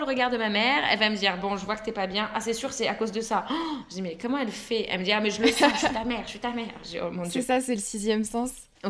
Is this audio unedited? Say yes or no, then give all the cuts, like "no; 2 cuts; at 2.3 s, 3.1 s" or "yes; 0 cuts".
yes; 0 cuts